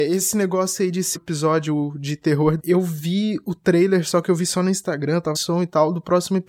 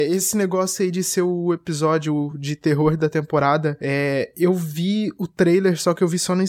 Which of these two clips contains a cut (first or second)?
first